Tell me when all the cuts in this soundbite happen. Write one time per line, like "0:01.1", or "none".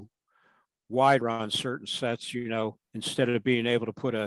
0:01.2
0:02.8